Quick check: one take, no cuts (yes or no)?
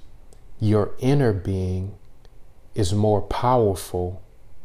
yes